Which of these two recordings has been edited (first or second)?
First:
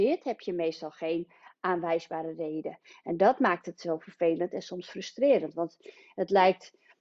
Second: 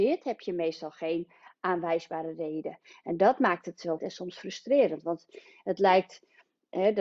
second